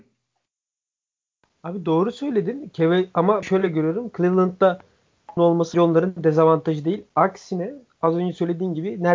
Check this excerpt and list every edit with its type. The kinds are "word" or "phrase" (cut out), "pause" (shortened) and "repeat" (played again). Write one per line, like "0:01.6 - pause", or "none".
0:03.4 - word
0:05.4 - phrase
0:05.7 - word